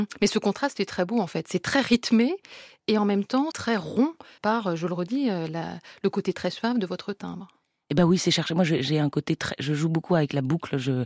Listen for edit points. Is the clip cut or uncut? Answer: cut